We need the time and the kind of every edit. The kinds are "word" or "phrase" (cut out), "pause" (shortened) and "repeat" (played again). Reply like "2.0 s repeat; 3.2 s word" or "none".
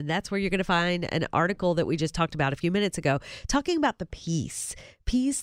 none